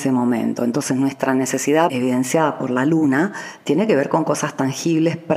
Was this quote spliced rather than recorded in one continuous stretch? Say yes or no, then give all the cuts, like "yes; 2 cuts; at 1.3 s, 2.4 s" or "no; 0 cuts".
yes; 1 cut; at 1.9 s